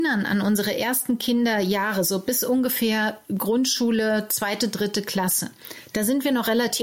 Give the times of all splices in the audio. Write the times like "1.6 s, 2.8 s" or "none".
none